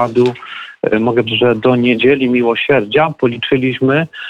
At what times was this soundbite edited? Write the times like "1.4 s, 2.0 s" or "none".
1.2 s